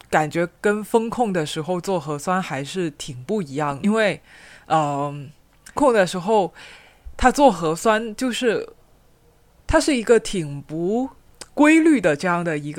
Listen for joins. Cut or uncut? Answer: cut